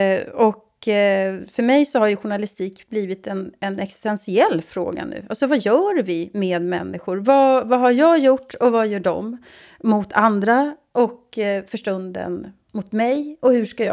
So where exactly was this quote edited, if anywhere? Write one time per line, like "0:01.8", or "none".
none